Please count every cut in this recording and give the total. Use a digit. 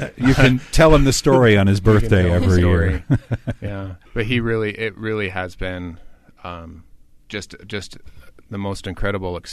1